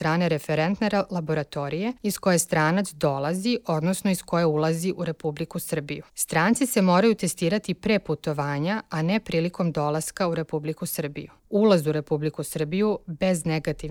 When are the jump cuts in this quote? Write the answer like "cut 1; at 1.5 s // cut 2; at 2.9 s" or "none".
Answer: cut 1; at 2.0 s // cut 2; at 6.1 s // cut 3; at 11.4 s